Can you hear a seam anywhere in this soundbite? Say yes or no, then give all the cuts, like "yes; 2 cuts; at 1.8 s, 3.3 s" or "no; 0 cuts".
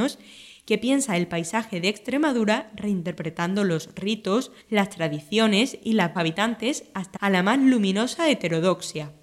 yes; 3 cuts; at 4.6 s, 6.2 s, 7.2 s